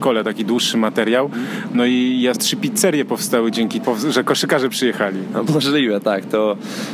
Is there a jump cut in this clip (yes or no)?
yes